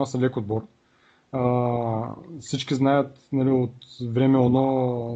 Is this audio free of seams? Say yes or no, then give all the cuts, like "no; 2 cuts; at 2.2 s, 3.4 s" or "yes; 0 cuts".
yes; 0 cuts